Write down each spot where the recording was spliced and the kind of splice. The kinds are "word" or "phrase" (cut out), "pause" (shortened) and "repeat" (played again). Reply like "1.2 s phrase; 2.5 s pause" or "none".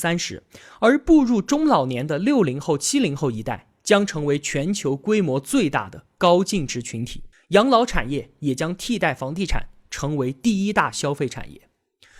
7.3 s pause